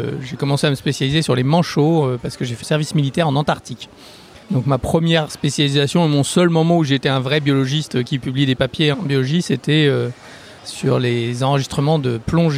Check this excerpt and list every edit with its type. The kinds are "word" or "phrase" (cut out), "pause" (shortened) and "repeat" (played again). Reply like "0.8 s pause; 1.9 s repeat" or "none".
2.6 s word; 4.4 s pause; 8.9 s word; 10.6 s pause